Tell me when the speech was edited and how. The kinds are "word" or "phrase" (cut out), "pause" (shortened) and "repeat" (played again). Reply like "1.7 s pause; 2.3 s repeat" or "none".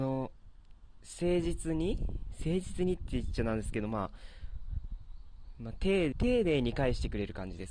6.1 s word